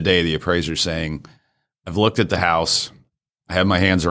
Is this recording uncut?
yes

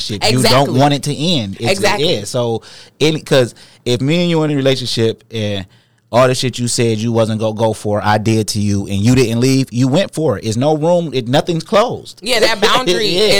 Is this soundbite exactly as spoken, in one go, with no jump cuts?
yes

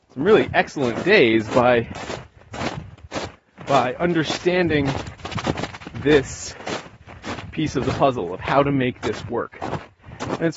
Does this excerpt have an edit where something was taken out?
no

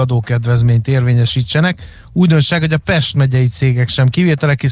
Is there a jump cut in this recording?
no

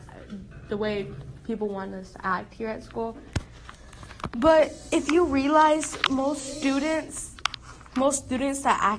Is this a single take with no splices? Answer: yes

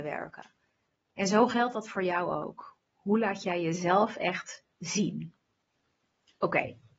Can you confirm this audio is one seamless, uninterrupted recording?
no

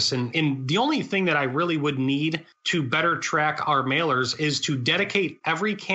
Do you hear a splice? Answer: no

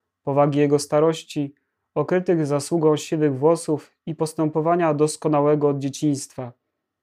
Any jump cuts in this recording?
no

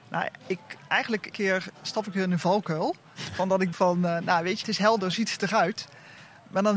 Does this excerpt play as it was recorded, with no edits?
no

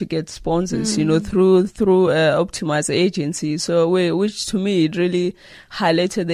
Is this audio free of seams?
yes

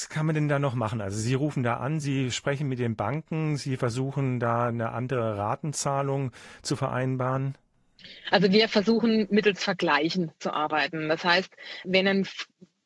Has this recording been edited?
no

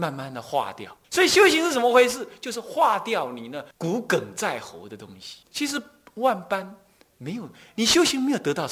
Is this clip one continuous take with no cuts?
no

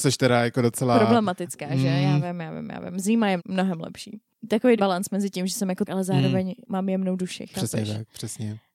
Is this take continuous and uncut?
no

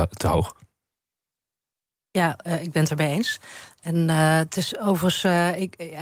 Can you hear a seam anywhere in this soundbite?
no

